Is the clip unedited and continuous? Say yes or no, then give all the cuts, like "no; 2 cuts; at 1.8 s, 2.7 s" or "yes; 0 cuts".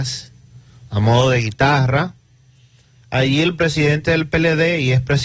yes; 0 cuts